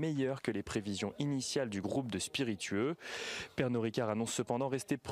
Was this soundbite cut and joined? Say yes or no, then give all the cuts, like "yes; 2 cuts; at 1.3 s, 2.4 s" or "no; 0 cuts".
no; 0 cuts